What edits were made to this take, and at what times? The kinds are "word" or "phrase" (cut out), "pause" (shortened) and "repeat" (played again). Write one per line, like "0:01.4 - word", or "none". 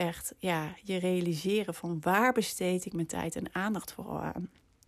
none

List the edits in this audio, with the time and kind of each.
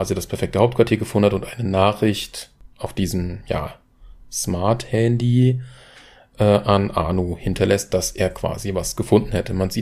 none

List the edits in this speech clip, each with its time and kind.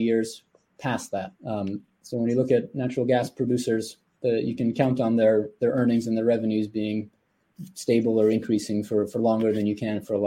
0:01.4 - pause

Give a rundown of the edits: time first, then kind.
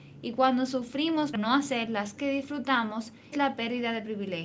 0:01.3 - word
0:02.2 - word
0:03.3 - word

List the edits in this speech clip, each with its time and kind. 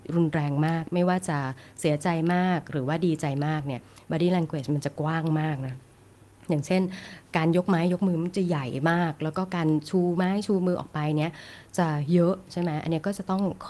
none

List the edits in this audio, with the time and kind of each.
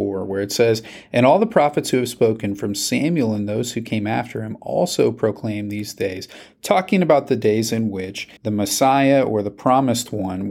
0:08.4 - pause

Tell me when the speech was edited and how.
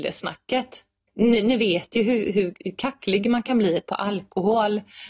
none

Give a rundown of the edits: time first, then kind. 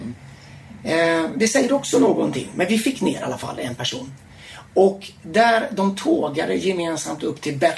none

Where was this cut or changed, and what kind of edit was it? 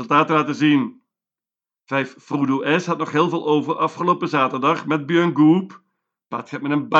none

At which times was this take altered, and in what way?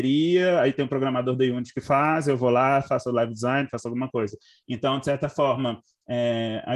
none

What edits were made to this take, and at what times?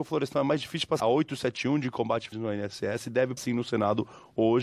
0:01.0 - phrase
0:02.3 - word
0:03.4 - word

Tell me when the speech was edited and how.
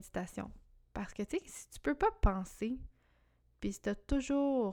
none

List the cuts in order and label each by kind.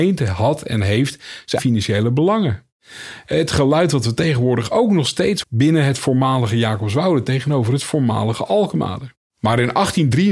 0:01.6 - word
0:05.4 - word

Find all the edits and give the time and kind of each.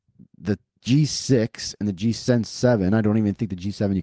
none

